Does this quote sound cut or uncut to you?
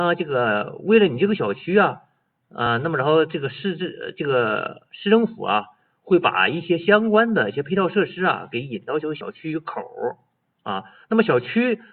uncut